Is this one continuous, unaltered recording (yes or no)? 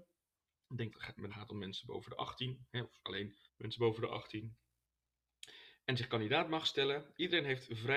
no